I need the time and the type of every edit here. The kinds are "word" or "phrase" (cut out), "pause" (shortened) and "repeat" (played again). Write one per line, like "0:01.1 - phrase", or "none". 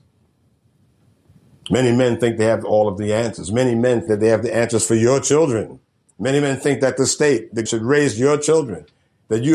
0:04.1 - word
0:07.7 - word